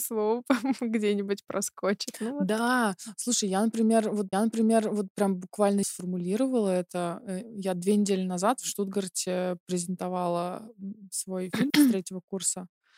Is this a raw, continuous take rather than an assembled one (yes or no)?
no